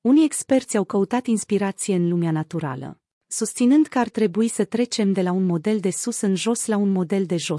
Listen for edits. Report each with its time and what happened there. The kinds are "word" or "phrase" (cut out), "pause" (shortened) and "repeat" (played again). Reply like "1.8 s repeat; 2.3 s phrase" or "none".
none